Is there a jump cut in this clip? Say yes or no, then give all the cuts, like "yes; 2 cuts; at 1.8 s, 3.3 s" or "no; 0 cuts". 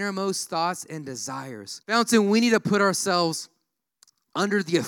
yes; 1 cut; at 1.8 s